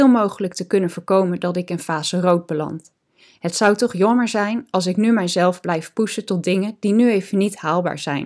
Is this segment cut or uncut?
uncut